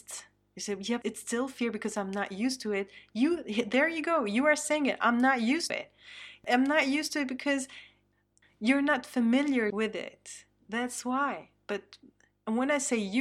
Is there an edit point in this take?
yes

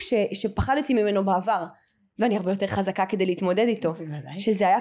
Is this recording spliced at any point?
no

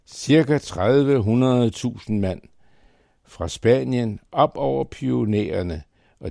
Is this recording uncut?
yes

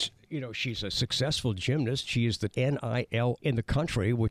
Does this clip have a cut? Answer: yes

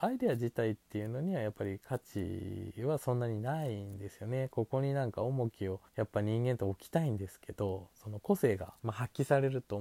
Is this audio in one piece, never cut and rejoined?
no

